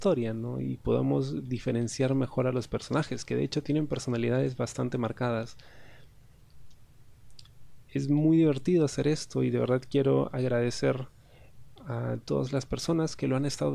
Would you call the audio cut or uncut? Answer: uncut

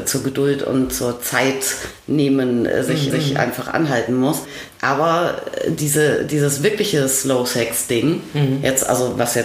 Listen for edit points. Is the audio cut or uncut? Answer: cut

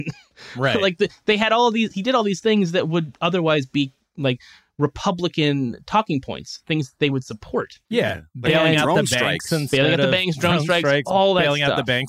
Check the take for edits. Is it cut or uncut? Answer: cut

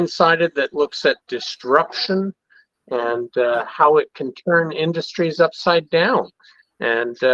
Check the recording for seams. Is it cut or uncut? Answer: uncut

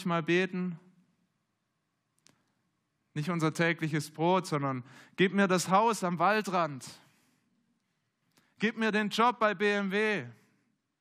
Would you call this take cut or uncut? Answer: uncut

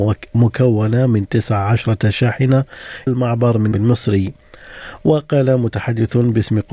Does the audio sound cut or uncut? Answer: cut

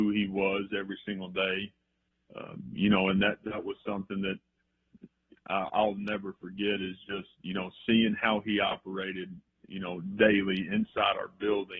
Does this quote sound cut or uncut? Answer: uncut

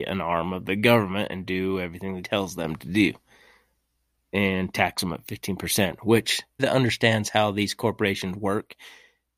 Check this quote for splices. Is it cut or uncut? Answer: cut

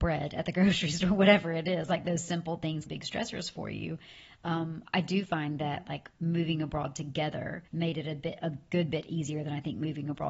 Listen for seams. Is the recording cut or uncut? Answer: cut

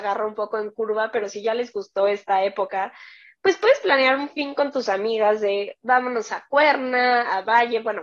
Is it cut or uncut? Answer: uncut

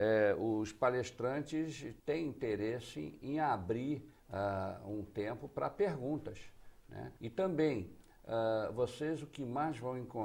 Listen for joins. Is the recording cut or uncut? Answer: cut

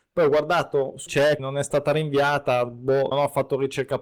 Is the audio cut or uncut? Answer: cut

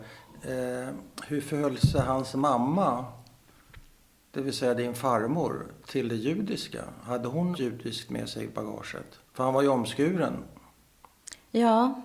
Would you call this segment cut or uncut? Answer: cut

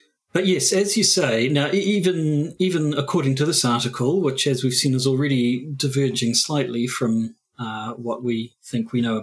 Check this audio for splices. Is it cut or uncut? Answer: uncut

